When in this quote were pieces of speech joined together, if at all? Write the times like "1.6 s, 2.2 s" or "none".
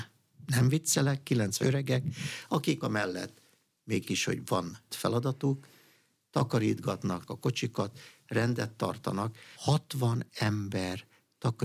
1.6 s, 2.8 s, 4.1 s, 4.9 s, 7.3 s, 9.5 s, 10.3 s